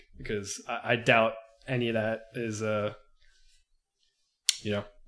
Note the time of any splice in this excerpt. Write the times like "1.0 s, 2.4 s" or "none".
none